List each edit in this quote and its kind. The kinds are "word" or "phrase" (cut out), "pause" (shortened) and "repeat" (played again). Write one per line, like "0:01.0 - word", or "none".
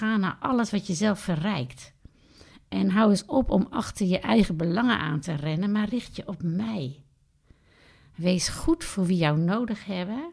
none